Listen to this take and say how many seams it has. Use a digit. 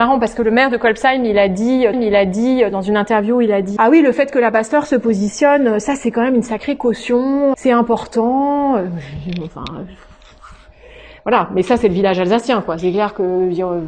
3